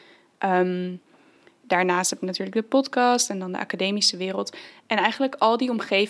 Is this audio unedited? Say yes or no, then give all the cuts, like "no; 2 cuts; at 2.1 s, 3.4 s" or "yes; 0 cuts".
yes; 0 cuts